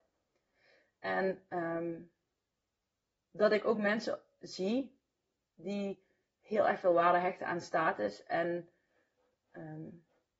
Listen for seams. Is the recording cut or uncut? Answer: uncut